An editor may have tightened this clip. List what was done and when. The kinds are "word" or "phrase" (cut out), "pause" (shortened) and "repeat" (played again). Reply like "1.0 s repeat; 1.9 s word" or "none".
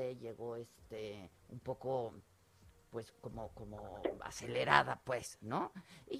1.4 s pause